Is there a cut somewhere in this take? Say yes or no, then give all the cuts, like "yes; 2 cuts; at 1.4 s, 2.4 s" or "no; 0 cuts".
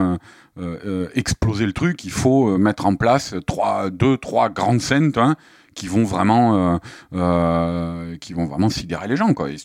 no; 0 cuts